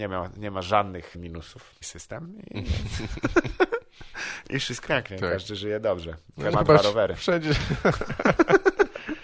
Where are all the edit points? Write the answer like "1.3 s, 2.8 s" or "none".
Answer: 1.1 s, 1.8 s, 4.8 s, 6.5 s